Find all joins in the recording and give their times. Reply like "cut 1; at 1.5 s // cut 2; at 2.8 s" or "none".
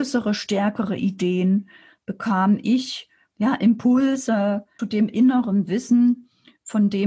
cut 1; at 4.8 s